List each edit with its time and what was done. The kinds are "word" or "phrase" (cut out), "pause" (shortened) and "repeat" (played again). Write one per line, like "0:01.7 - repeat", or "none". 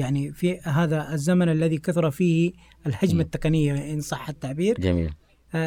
none